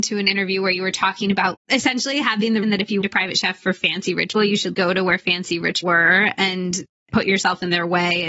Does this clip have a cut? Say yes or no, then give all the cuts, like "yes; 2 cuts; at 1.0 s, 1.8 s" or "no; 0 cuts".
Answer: yes; 6 cuts; at 1.5 s, 2.6 s, 3.0 s, 4.4 s, 4.7 s, 5.8 s